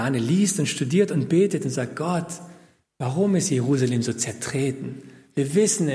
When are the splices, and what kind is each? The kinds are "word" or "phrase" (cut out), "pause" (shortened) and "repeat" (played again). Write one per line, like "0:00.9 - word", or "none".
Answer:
none